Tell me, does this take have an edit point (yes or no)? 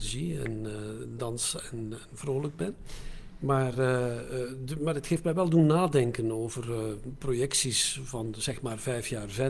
no